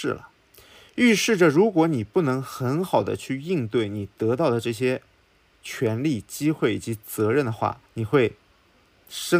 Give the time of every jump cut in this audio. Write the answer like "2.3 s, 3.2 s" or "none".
7.9 s